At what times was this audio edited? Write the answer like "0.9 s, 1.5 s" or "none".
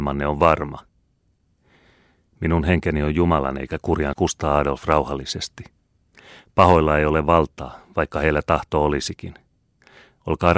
4.1 s

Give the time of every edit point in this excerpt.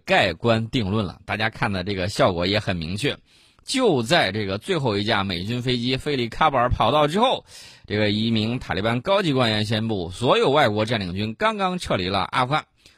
none

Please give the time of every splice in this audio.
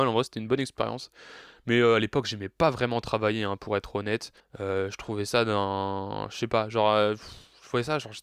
4.4 s

